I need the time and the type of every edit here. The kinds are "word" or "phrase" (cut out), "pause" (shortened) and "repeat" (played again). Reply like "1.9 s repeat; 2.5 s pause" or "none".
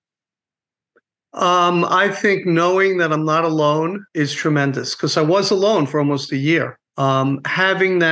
4.1 s pause; 6.9 s pause